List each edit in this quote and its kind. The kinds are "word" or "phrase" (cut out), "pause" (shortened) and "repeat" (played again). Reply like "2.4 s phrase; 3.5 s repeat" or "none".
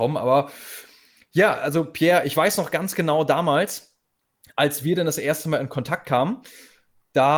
none